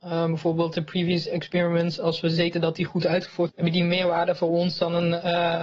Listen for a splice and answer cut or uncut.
cut